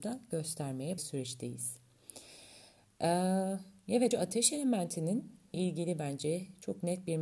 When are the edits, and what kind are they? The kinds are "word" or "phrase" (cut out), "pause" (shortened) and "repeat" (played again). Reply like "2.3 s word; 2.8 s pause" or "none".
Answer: 1.0 s word; 4.1 s word; 5.5 s word